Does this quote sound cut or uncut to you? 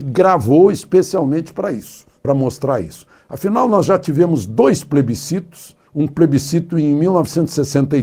uncut